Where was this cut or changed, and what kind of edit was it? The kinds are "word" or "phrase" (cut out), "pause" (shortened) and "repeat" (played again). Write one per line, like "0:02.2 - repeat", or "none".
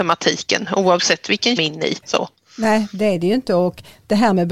0:01.6 - phrase
0:02.0 - pause